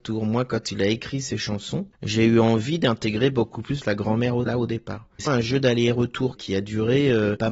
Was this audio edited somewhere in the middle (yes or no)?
yes